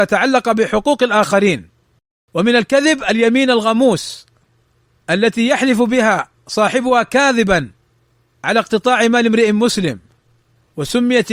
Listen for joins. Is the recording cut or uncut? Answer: uncut